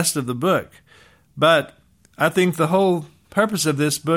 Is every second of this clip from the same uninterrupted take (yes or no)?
yes